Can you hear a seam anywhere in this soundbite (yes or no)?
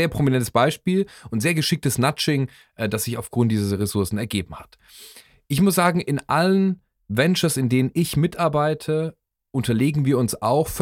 no